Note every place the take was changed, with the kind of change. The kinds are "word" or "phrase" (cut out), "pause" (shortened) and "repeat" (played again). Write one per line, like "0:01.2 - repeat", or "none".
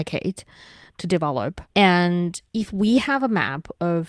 0:01.7 - pause